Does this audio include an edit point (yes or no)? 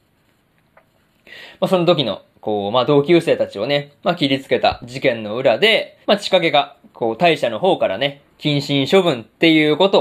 yes